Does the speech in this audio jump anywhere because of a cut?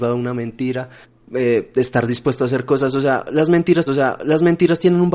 yes; 2 cuts; at 1.0 s, 3.9 s

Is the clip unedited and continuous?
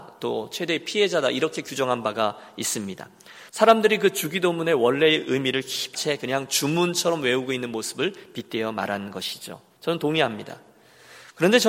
no; 2 cuts; at 3.5 s, 5.9 s

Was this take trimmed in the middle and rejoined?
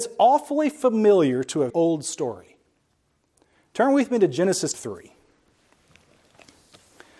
yes; 2 cuts; at 1.7 s, 4.7 s

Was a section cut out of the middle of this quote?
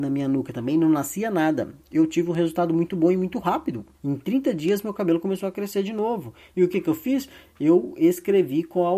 yes; 1 cut; at 3.9 s

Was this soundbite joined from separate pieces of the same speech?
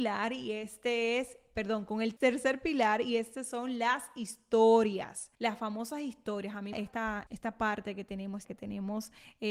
yes; 5 cuts; at 2.2 s, 5.3 s, 6.7 s, 7.3 s, 8.4 s

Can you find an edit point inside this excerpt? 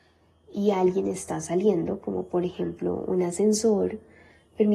no; 0 cuts

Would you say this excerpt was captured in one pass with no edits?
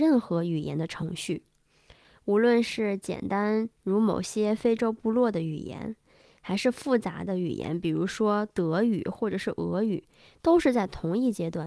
yes; 0 cuts

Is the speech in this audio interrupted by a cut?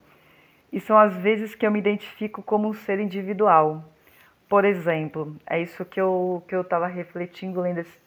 no; 0 cuts

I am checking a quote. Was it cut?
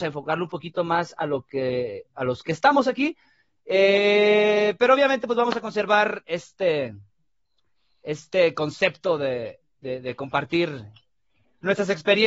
no; 0 cuts

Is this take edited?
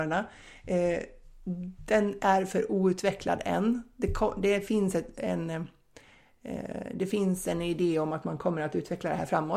no; 0 cuts

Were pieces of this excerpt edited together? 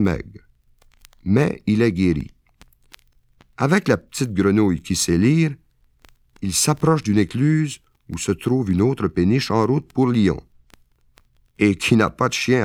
no; 0 cuts

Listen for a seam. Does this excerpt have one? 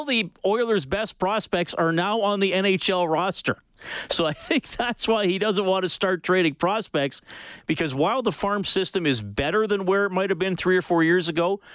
no; 0 cuts

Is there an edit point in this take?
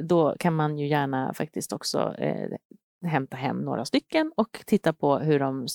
no; 0 cuts

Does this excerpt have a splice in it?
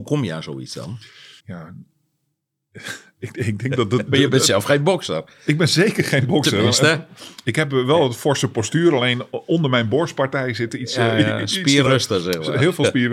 yes; 3 cuts; at 1.4 s, 4.1 s, 11.9 s

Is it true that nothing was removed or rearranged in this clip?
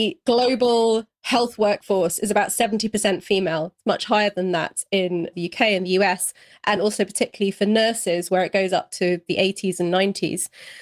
yes; 0 cuts

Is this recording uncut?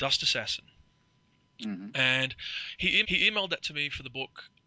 no; 1 cut; at 3.0 s

